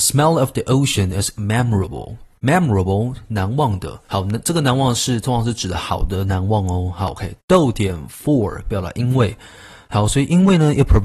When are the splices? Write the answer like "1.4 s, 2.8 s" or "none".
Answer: 4.0 s